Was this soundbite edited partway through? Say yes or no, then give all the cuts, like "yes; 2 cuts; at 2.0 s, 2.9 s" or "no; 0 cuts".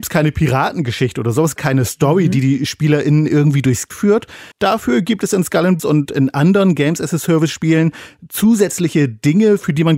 yes; 4 cuts; at 1.6 s, 3.9 s, 4.5 s, 5.8 s